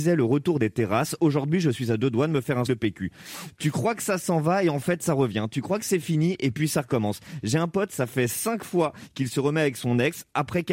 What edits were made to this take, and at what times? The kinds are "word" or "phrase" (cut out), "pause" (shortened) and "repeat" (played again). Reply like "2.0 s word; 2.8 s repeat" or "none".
2.7 s word